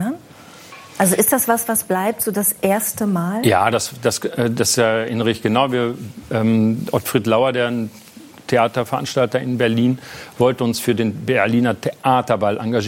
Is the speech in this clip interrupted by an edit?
no; 0 cuts

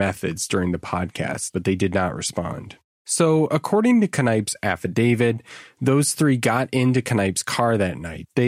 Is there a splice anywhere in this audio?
no; 0 cuts

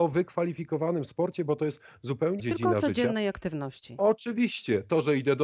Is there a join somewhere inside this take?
yes; 1 cut; at 2.4 s

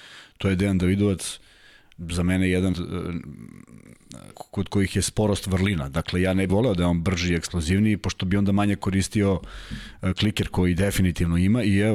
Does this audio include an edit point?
yes; 3 cuts; at 2.7 s, 4.3 s, 6.5 s

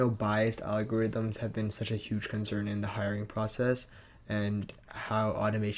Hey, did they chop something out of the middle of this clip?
no; 0 cuts

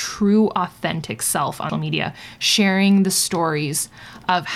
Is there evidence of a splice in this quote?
yes; 1 cut; at 1.7 s

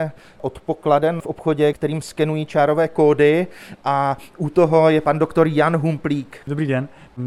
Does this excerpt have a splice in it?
no; 0 cuts

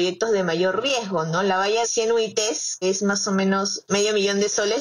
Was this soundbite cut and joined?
yes; 3 cuts; at 1.8 s, 2.8 s, 3.9 s

